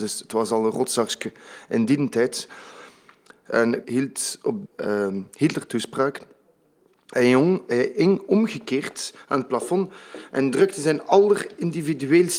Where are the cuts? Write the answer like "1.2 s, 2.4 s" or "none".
3.8 s, 4.7 s